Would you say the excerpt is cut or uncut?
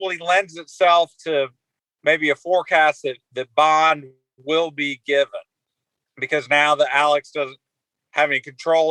uncut